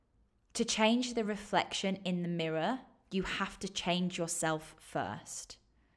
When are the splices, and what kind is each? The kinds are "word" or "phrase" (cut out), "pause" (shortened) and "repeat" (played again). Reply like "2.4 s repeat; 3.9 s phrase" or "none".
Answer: none

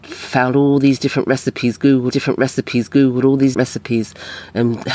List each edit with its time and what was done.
2.1 s repeat; 3.5 s word

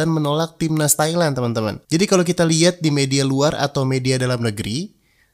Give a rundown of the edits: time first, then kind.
1.8 s pause

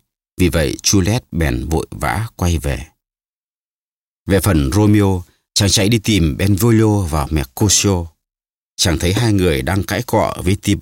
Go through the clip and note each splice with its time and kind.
none

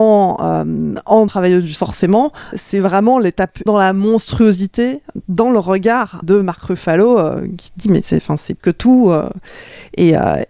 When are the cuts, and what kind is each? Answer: 1.3 s word; 1.8 s word; 2.5 s word; 3.7 s word; 6.2 s word; 8.6 s word

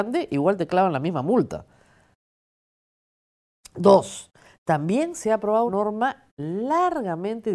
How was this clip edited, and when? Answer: 5.7 s word

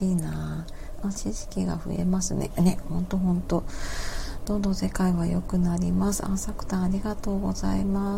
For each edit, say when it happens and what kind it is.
1.1 s phrase

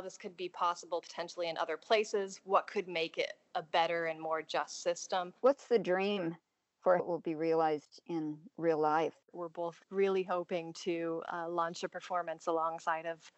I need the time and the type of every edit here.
5.4 s pause; 7.0 s word; 9.2 s pause; 9.8 s pause

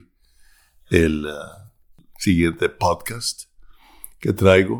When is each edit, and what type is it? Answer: none

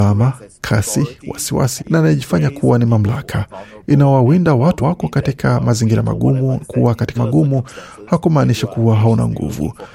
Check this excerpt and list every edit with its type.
1.8 s word; 4.8 s word; 6.6 s word; 7.2 s word

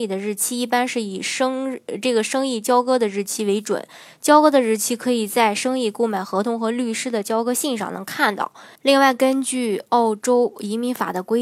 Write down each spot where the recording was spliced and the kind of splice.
8.8 s pause

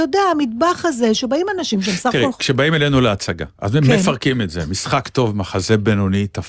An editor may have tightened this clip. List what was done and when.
3.5 s pause

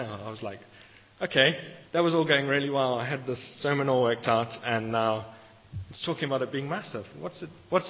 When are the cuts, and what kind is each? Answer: 1.9 s pause

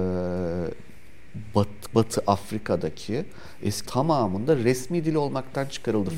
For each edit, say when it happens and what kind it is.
1.9 s word; 3.9 s word

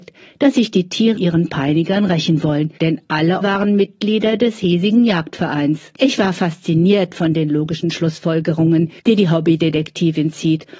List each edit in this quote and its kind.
1.2 s word; 2.8 s pause; 3.4 s word; 6.0 s pause; 9.0 s pause

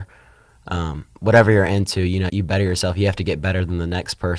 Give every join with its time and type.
2.3 s word

